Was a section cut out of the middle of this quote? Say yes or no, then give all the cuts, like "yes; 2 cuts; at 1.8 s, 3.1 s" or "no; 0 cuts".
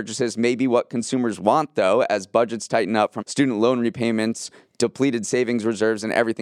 yes; 1 cut; at 3.2 s